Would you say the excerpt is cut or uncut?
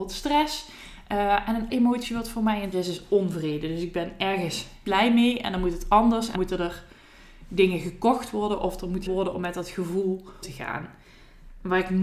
cut